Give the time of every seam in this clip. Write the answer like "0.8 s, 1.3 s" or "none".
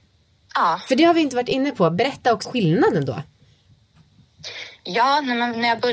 2.4 s